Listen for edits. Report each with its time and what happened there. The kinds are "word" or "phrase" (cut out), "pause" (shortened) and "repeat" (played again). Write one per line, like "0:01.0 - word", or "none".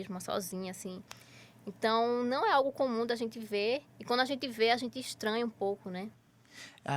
0:03.9 - pause